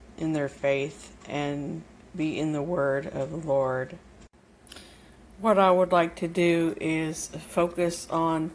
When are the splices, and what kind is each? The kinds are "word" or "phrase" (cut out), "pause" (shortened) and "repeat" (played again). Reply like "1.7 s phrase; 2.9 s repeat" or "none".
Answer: none